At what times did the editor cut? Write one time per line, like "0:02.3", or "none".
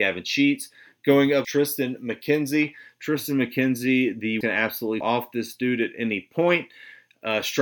0:01.4
0:04.4
0:05.0